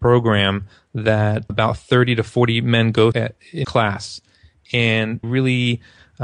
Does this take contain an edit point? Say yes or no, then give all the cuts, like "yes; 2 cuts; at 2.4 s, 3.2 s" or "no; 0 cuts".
yes; 4 cuts; at 1.5 s, 3.1 s, 3.6 s, 5.2 s